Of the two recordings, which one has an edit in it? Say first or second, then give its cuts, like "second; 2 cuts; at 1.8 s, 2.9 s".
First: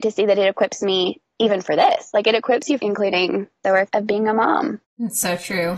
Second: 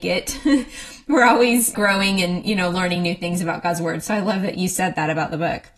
first; 1 cut; at 2.8 s